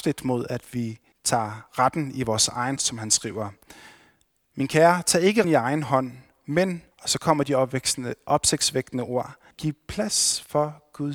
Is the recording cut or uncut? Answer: cut